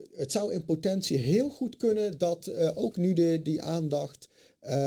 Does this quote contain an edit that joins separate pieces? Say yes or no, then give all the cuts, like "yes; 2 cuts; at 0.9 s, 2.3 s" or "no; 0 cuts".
no; 0 cuts